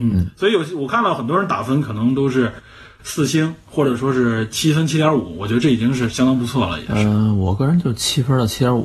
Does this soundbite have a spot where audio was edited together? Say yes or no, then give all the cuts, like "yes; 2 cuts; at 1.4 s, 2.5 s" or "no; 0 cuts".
no; 0 cuts